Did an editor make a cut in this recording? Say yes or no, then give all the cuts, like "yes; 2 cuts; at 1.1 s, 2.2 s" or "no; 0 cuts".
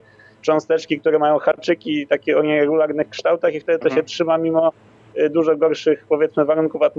no; 0 cuts